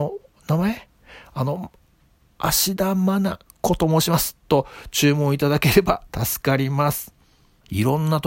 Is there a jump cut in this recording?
no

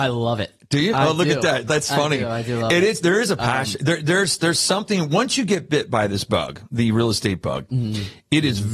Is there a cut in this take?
no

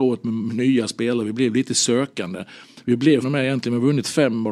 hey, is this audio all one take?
no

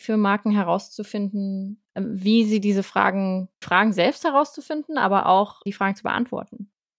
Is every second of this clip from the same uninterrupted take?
no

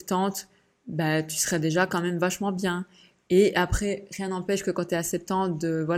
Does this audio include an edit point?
no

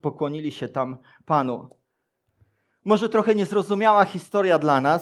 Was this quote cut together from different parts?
no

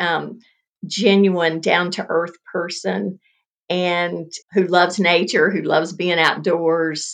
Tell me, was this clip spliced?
yes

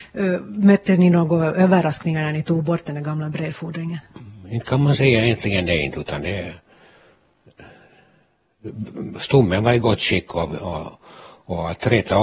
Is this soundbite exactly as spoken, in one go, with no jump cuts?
yes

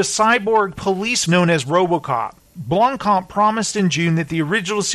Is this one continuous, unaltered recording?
no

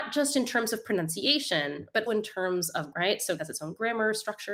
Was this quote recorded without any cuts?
no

